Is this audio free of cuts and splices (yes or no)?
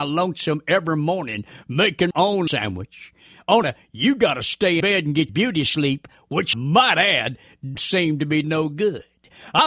no